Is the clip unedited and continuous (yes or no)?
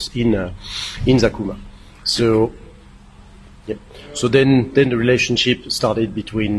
yes